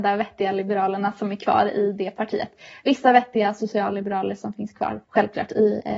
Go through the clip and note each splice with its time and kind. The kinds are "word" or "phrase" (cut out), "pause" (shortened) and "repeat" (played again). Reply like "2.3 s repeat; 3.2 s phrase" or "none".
5.0 s pause